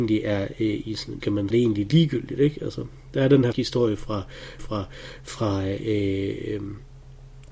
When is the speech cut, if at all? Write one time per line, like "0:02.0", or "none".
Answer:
0:01.2
0:01.5
0:03.5
0:04.6

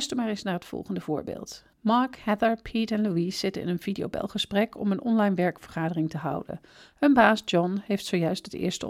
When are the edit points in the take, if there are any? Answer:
0:01.7

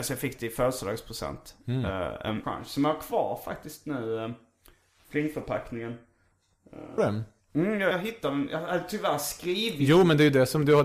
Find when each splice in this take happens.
0:02.4
0:07.0
0:07.9

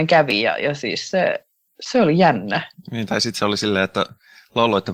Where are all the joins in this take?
0:01.7

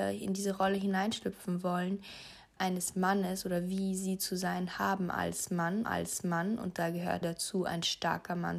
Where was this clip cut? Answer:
0:02.6
0:05.8
0:07.2

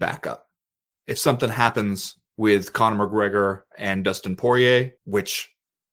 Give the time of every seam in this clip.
0:02.3
0:05.0

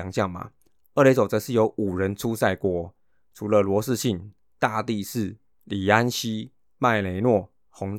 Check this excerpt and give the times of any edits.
none

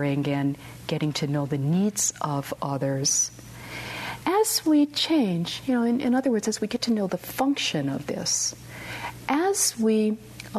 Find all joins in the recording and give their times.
none

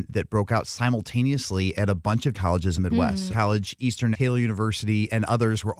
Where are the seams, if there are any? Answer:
0:02.3
0:02.7
0:03.3
0:04.1

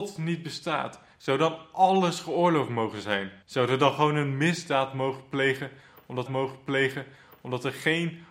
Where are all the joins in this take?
0:03.4
0:06.3

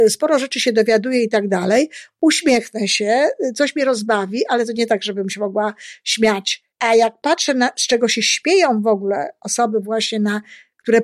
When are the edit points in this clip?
0:06.7

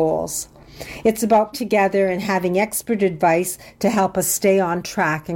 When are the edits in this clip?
0:01.5

